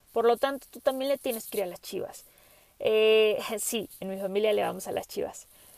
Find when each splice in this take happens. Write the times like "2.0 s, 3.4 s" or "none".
none